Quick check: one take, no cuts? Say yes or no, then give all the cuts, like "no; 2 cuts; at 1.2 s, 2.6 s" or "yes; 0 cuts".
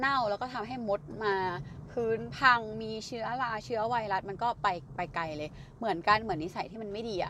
yes; 0 cuts